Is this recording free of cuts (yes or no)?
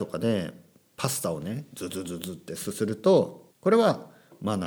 no